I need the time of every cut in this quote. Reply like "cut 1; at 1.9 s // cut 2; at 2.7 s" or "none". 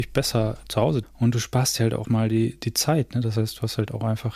cut 1; at 1.0 s // cut 2; at 2.0 s